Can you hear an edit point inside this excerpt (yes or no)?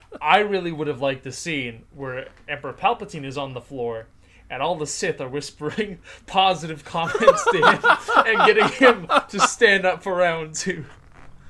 no